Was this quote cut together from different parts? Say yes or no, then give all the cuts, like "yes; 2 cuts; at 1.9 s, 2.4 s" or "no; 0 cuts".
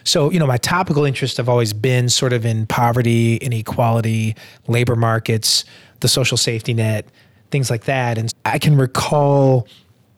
yes; 1 cut; at 8.3 s